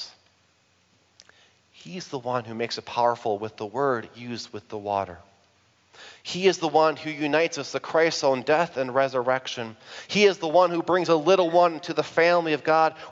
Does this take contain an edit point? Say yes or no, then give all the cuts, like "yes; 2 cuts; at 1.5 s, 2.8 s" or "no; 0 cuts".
no; 0 cuts